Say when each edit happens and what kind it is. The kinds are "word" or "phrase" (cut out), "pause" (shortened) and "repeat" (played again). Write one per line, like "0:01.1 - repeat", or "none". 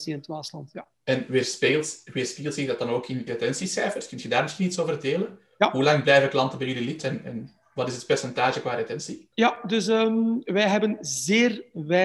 0:00.9 - pause
0:03.3 - phrase
0:09.3 - pause